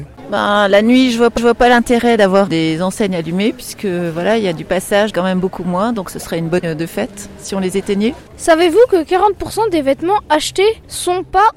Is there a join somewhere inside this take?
yes; 4 cuts; at 1.4 s, 2.5 s, 5.1 s, 6.6 s

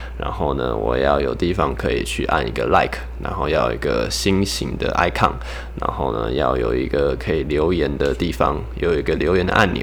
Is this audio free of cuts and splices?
yes; 0 cuts

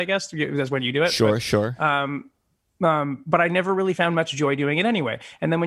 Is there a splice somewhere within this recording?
no; 0 cuts

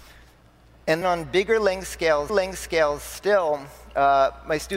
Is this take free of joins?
no; 2 cuts; at 1.0 s, 2.3 s

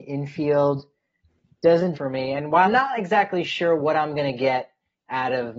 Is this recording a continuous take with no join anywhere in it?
no; 2 cuts; at 1.9 s, 2.6 s

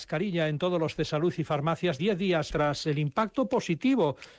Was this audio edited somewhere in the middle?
yes; 3 cuts; at 1.0 s, 2.0 s, 2.5 s

